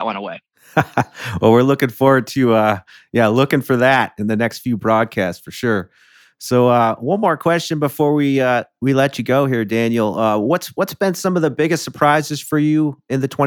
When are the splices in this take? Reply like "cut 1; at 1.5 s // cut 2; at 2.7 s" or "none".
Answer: none